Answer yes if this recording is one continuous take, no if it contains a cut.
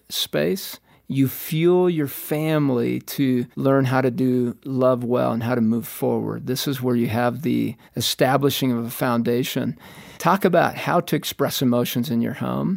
no